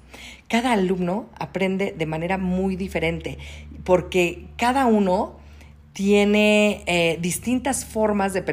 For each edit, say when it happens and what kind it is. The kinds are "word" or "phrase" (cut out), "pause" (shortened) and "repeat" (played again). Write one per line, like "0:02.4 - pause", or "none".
none